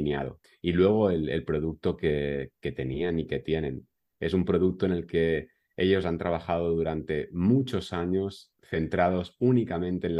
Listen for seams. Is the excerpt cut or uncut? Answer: uncut